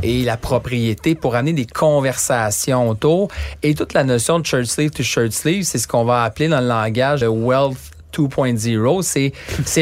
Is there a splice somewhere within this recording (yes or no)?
yes